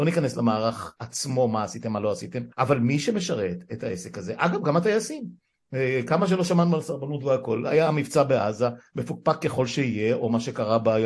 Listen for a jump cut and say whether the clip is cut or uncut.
cut